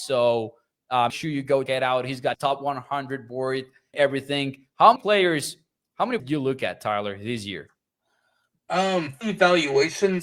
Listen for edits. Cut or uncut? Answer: cut